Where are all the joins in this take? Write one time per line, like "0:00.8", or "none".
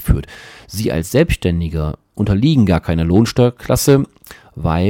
none